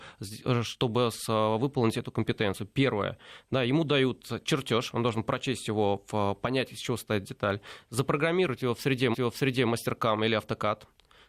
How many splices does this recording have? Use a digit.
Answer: 1